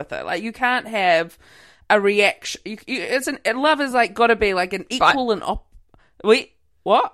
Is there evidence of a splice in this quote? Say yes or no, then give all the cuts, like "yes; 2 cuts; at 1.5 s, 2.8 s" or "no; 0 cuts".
no; 0 cuts